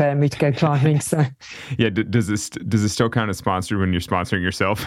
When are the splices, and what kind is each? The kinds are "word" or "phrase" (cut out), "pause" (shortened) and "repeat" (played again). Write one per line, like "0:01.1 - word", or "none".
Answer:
none